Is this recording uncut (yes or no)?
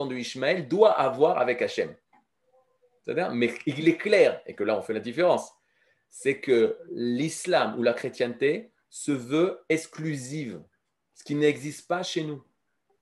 yes